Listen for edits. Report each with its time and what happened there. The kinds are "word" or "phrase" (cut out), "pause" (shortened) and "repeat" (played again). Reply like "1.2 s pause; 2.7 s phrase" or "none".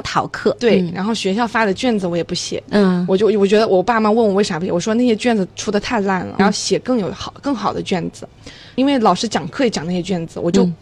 none